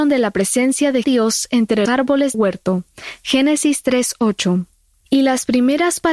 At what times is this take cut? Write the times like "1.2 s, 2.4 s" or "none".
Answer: 1.0 s, 1.9 s, 2.3 s